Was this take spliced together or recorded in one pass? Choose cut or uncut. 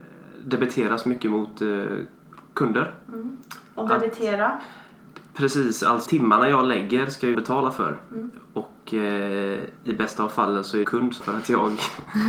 cut